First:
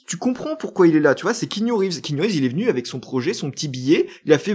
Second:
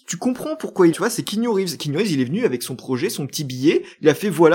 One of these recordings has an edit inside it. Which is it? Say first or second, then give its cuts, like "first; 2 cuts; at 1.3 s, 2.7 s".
second; 1 cut; at 0.9 s